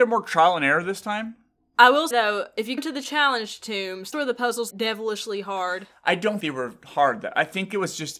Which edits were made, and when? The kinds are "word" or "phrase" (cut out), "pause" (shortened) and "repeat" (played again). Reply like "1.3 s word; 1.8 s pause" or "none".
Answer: 2.1 s word; 2.8 s word; 4.1 s word; 4.7 s word; 6.4 s word